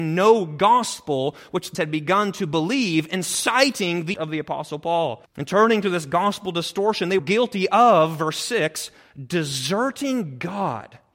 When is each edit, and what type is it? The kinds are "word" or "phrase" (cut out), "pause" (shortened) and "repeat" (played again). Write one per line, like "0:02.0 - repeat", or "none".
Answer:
0:01.7 - word
0:04.1 - word
0:05.3 - pause
0:07.2 - word